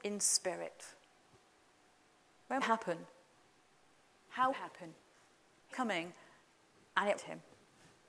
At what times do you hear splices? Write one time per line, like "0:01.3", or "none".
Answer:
0:02.6
0:04.5
0:05.7
0:07.2